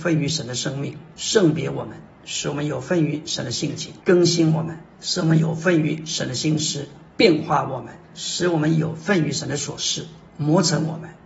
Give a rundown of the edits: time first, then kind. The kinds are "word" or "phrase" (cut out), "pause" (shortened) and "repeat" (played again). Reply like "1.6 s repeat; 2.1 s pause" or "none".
1.1 s pause; 4.0 s pause; 4.9 s pause; 8.0 s pause